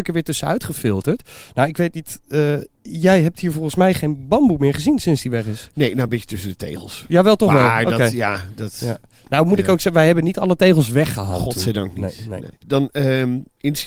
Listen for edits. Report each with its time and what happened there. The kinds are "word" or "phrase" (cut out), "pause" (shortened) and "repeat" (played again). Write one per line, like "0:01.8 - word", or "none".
none

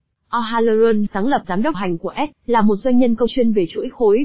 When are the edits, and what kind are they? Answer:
0:01.1 - word
0:01.4 - word
0:01.7 - word
0:02.3 - word
0:03.3 - word

